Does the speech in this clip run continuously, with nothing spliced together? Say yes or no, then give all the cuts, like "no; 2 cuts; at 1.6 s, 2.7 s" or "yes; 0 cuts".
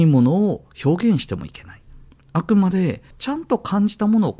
yes; 0 cuts